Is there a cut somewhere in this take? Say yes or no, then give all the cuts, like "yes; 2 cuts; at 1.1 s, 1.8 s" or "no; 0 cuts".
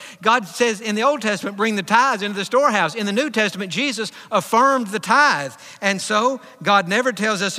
no; 0 cuts